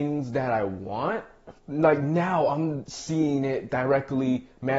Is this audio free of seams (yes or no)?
no